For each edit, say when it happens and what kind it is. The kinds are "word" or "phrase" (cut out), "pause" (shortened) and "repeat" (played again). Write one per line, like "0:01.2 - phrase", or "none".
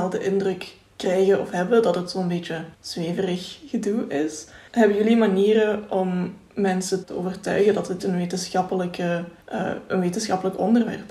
0:02.7 - pause
0:04.7 - pause
0:07.0 - word
0:08.0 - phrase
0:09.4 - pause